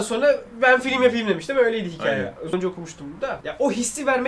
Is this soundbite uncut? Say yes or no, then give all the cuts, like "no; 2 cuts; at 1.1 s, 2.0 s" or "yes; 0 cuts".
no; 1 cut; at 2.5 s